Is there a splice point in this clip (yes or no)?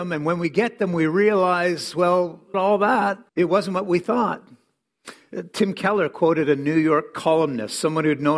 yes